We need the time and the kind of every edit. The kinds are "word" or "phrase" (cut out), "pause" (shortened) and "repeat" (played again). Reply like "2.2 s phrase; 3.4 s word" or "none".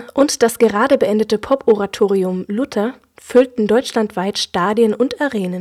none